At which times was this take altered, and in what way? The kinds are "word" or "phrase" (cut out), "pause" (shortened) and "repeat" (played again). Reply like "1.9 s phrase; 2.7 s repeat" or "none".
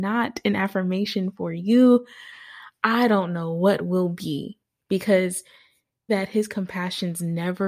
6.1 s word